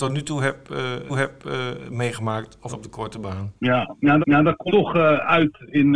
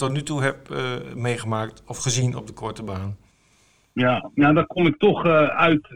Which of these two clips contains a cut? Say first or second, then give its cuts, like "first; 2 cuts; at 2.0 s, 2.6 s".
first; 5 cuts; at 1.1 s, 2.7 s, 3.6 s, 4.2 s, 4.7 s